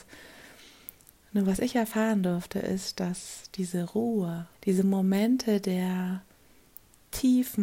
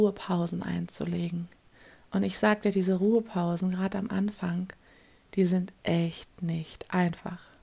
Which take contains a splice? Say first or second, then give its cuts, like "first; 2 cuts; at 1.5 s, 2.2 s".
first; 1 cut; at 4.5 s